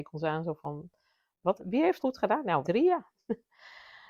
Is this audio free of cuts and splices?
no; 3 cuts; at 1.6 s, 2.0 s, 2.6 s

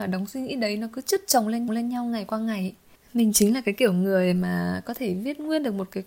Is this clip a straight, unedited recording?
no; 1 cut; at 1.7 s

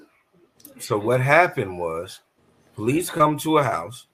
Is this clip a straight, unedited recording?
no; 1 cut; at 2.4 s

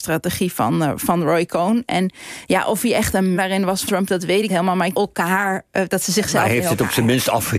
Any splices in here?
yes; 4 cuts; at 3.3 s, 3.9 s, 4.5 s, 4.9 s

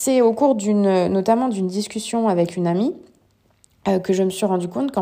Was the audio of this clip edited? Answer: no; 0 cuts

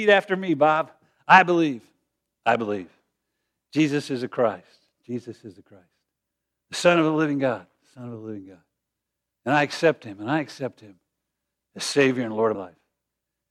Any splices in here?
yes; 1 cut; at 12.5 s

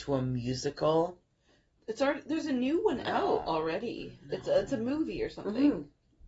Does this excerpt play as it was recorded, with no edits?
yes; 0 cuts

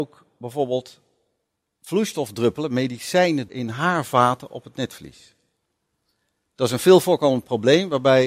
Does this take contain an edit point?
yes; 1 cut; at 3.5 s

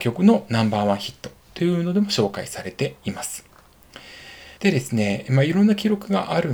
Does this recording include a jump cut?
yes; 1 cut; at 4.6 s

